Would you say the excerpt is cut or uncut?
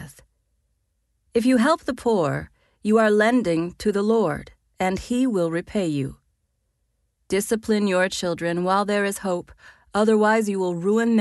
uncut